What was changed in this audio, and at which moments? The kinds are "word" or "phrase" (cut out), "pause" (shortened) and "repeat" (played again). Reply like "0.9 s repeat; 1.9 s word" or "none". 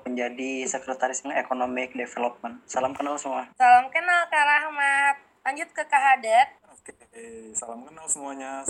1.2 s word; 3.5 s pause; 6.6 s pause